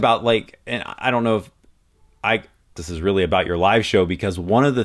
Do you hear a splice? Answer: yes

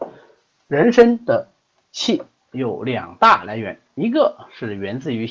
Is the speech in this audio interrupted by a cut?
no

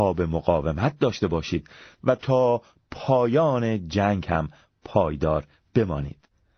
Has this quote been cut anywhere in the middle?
no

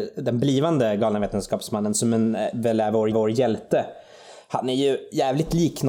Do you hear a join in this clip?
yes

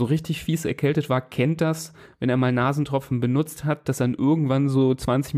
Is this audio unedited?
yes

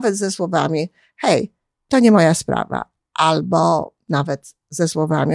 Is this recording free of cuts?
yes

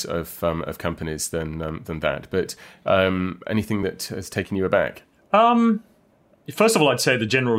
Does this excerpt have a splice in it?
no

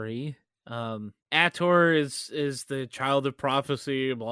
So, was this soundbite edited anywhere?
yes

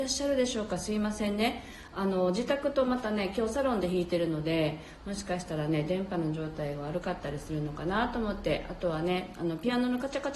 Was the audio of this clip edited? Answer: no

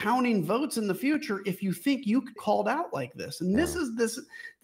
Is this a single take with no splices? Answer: no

